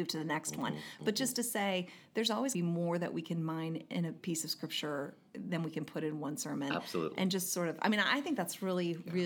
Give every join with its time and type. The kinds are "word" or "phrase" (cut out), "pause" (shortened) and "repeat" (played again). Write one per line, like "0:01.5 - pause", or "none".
0:02.5 - phrase